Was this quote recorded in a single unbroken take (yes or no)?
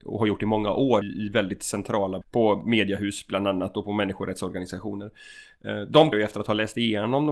no